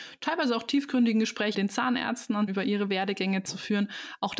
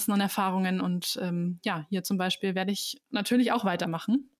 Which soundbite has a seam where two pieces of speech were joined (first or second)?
first